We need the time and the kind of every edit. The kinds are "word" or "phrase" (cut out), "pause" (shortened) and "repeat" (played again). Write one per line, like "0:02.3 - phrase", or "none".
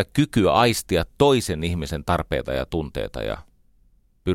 none